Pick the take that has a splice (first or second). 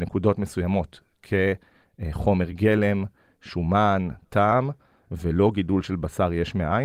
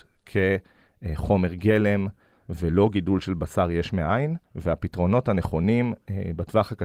second